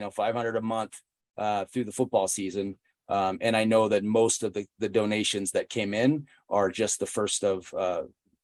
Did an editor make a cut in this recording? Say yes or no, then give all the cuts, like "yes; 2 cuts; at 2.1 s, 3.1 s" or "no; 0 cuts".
no; 0 cuts